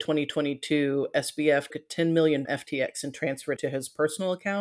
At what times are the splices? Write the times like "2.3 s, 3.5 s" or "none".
1.7 s, 2.5 s, 3.6 s